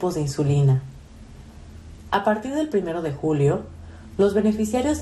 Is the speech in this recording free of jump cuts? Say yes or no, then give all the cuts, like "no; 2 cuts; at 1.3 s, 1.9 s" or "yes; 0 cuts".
yes; 0 cuts